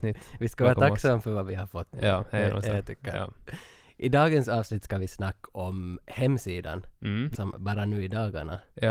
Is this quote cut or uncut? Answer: cut